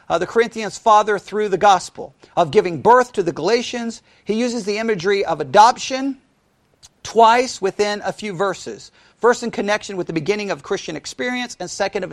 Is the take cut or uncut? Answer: uncut